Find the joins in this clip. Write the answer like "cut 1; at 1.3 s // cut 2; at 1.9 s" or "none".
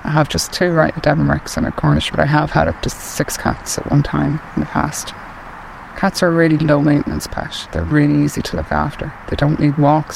cut 1; at 0.9 s // cut 2; at 2.1 s